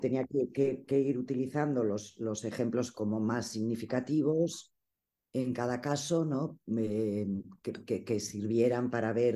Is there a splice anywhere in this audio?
no; 0 cuts

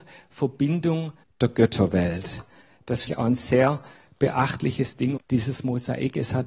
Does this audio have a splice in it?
yes; 3 cuts; at 1.2 s, 3.1 s, 5.2 s

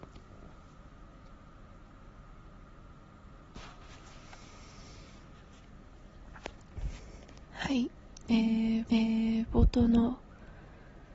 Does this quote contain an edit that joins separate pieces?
yes; 1 cut; at 8.8 s

